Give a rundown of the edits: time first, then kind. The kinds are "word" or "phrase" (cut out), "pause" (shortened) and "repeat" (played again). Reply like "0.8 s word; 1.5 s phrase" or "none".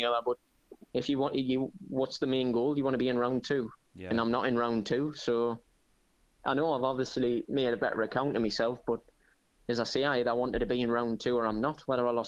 none